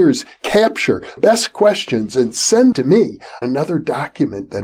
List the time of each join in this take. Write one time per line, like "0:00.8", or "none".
0:01.2
0:02.7
0:03.4